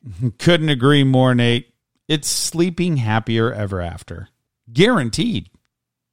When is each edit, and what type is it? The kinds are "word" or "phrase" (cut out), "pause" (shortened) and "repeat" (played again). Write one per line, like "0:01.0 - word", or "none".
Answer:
none